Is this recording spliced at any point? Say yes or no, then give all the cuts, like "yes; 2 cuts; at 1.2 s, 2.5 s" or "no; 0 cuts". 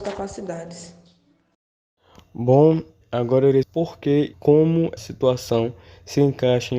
yes; 4 cuts; at 3.0 s, 3.6 s, 4.3 s, 5.0 s